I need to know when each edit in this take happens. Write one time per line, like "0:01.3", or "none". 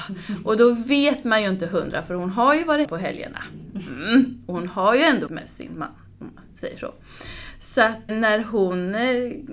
0:02.8
0:05.3
0:08.1